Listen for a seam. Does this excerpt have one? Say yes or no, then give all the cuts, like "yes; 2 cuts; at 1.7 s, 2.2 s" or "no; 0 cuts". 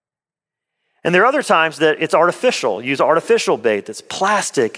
no; 0 cuts